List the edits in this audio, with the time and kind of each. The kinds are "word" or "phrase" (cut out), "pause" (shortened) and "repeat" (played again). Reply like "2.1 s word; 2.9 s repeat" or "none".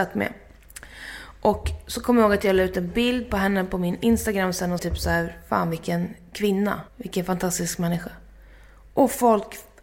4.8 s word; 6.9 s pause